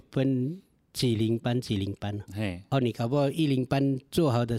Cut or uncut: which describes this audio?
uncut